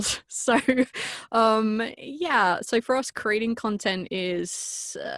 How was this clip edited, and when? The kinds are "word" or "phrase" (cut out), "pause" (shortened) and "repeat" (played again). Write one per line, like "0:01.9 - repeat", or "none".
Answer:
none

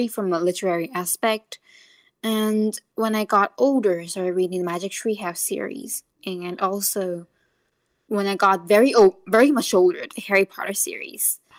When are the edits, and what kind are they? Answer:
none

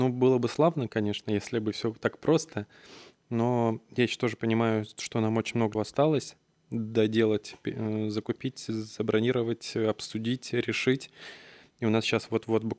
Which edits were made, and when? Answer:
0:05.7 - word

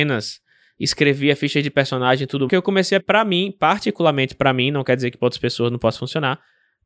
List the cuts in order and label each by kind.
0:02.5 - phrase
0:03.0 - phrase

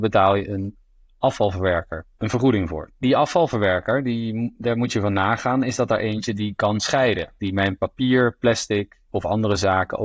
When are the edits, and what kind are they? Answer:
0:02.1 - pause
0:07.4 - pause
0:09.1 - pause

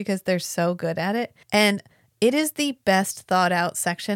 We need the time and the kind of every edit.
0:01.4 - pause

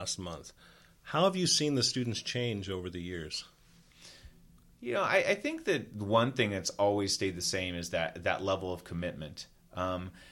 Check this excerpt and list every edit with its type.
none

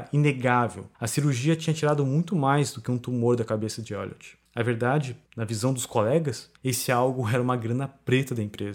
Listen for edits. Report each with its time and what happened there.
0:00.9 - pause
0:04.5 - pause
0:05.2 - pause
0:06.6 - pause

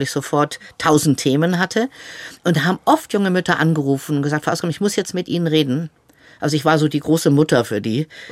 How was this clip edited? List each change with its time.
none

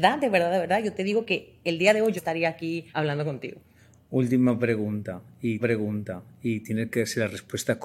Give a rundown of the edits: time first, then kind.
0:02.2 - word
0:02.9 - pause
0:05.6 - repeat

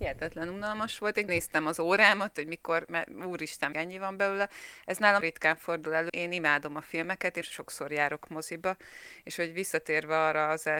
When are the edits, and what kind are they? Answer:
0:01.3 - word
0:03.7 - word
0:05.2 - word
0:06.1 - word
0:07.4 - word

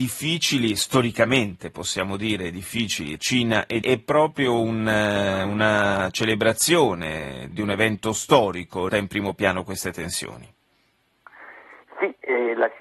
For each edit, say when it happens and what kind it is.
0:03.2 - word
0:03.8 - word
0:07.5 - word
0:08.9 - word

